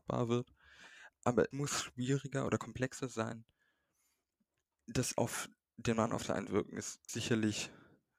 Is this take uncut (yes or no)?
no